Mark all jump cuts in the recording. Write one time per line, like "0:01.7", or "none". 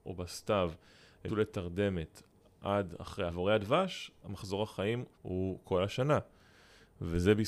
0:01.3
0:03.3
0:04.2
0:05.1